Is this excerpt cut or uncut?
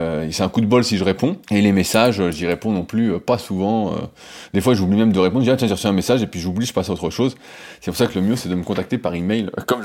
cut